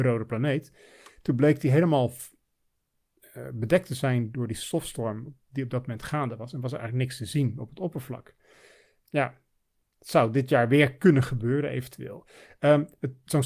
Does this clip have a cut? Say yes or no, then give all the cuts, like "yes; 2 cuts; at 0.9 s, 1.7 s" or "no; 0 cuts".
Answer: no; 0 cuts